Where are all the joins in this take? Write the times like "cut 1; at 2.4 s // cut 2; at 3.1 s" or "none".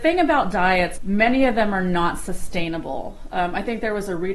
cut 1; at 0.9 s